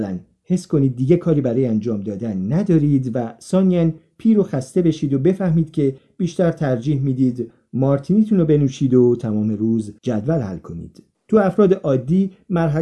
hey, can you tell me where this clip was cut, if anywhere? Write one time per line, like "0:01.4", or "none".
0:10.0
0:11.1